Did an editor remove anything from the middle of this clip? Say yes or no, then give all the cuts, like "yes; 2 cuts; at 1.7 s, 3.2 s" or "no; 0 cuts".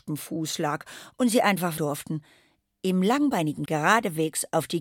yes; 2 cuts; at 1.8 s, 3.7 s